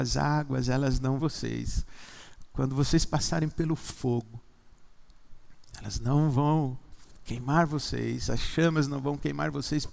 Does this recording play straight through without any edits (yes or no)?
no